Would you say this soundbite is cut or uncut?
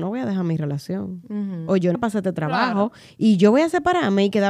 cut